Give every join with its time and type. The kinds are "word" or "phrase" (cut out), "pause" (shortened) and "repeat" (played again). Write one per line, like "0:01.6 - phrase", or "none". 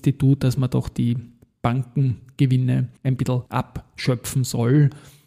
0:03.0 - pause
0:03.5 - pause